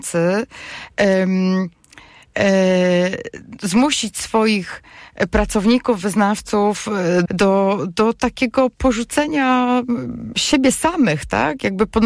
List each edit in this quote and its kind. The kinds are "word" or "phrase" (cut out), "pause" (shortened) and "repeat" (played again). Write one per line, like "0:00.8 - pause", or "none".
0:07.3 - word